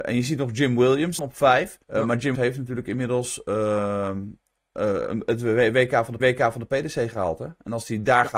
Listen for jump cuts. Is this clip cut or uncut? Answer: cut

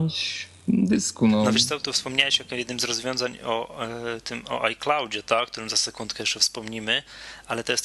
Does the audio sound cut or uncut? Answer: uncut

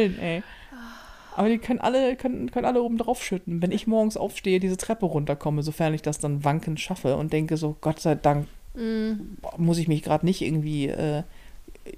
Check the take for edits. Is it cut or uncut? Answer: uncut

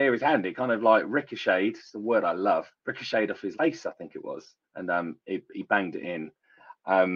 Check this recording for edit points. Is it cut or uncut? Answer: cut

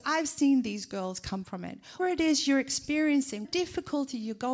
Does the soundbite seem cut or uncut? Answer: cut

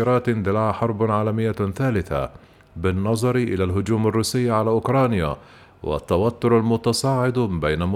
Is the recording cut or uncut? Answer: uncut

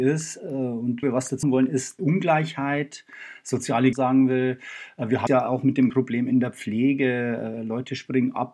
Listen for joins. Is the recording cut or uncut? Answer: cut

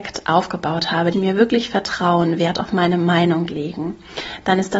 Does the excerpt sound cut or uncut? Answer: cut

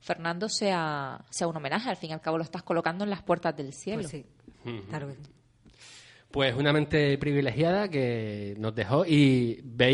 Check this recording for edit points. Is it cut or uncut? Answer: cut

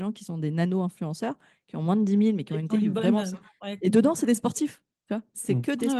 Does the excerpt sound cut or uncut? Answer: cut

